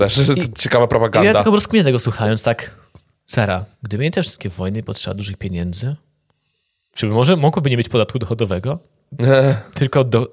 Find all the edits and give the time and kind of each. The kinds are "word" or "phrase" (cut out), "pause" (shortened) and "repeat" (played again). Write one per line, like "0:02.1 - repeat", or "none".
0:03.7 - pause